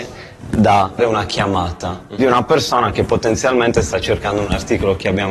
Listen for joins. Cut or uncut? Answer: cut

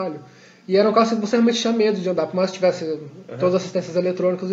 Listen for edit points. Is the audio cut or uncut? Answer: uncut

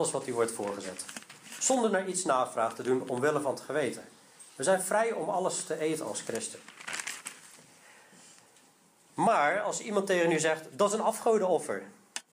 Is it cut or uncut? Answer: uncut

